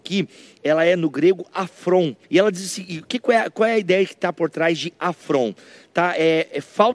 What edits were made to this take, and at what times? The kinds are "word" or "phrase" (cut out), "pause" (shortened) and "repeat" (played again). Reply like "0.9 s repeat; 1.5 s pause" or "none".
2.2 s pause